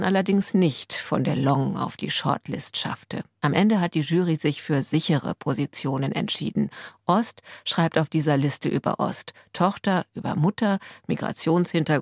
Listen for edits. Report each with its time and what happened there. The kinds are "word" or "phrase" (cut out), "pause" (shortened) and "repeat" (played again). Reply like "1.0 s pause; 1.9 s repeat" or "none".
none